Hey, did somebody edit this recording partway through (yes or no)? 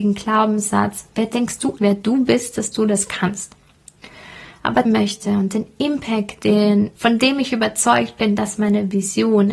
yes